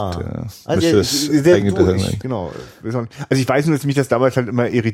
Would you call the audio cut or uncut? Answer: uncut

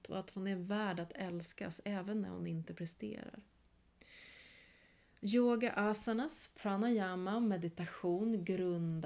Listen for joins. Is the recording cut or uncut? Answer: uncut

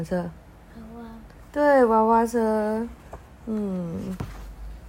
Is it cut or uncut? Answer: uncut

